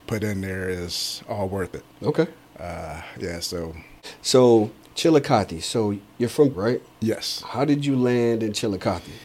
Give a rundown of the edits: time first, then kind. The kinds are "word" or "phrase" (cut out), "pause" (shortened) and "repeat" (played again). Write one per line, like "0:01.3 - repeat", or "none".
0:01.9 - pause
0:04.8 - pause
0:06.5 - word